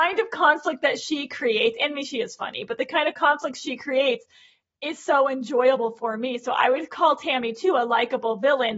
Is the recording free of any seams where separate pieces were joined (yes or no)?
yes